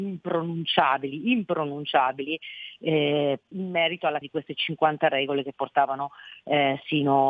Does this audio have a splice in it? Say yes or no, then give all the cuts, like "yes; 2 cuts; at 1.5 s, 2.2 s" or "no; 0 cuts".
yes; 2 cuts; at 3.5 s, 4.2 s